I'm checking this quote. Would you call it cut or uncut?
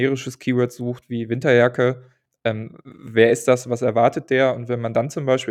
uncut